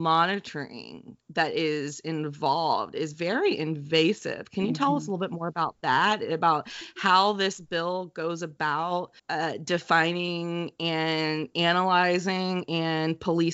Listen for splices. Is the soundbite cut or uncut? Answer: cut